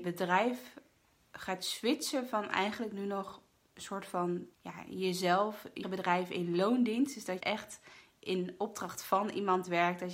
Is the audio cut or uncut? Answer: cut